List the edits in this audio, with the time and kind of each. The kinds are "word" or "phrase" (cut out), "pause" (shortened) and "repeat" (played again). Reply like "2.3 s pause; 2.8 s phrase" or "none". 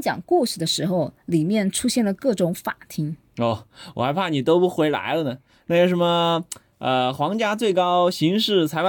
none